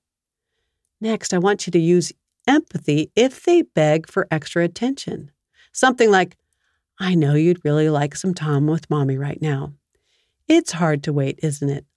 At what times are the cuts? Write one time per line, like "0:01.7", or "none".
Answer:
none